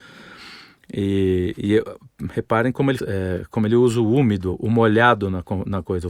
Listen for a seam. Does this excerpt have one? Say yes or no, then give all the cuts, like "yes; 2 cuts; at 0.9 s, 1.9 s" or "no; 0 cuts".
yes; 1 cut; at 3.0 s